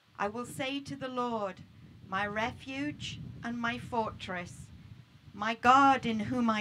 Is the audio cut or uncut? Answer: uncut